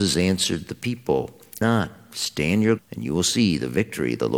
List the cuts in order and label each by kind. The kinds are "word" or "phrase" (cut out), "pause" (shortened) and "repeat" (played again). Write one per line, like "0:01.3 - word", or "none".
0:01.6 - word
0:02.8 - word